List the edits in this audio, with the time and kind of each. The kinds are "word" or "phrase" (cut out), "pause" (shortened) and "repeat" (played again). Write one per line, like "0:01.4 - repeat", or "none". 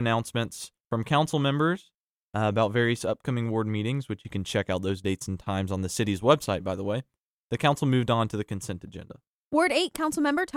none